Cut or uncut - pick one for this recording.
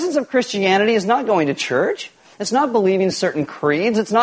uncut